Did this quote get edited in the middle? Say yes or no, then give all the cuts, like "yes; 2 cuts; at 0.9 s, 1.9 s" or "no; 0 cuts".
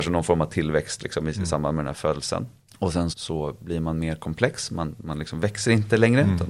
yes; 2 cuts; at 2.7 s, 3.1 s